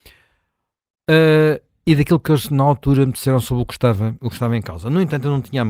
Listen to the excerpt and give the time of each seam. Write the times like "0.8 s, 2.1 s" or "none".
none

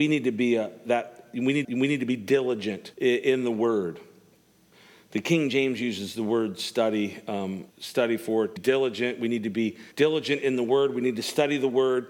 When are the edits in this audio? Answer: 1.6 s, 2.9 s, 4.7 s, 7.7 s, 8.6 s, 9.9 s

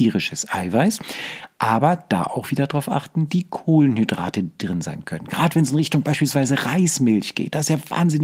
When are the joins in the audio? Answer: none

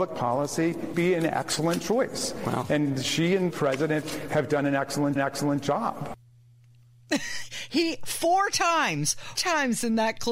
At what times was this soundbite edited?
0.9 s, 3.5 s, 5.2 s, 9.4 s

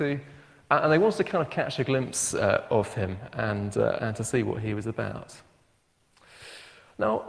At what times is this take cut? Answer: none

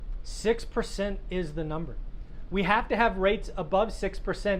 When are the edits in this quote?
none

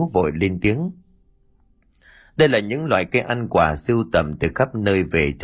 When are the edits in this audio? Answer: none

